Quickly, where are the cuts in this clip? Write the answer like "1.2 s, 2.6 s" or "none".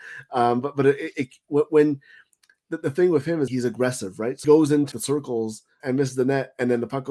3.5 s, 4.4 s, 4.9 s, 5.8 s